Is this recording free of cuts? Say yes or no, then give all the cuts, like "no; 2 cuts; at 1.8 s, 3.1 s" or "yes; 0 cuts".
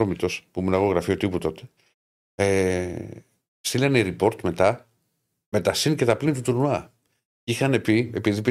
yes; 0 cuts